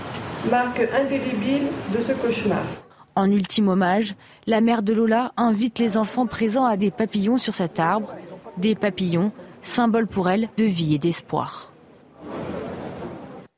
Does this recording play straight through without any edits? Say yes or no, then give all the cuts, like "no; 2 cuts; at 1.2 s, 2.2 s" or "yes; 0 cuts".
no; 2 cuts; at 6.8 s, 10.6 s